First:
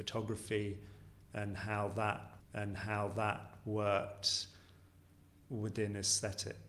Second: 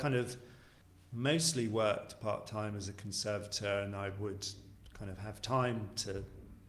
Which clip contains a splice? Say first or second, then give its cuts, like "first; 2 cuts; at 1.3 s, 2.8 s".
first; 1 cut; at 2.4 s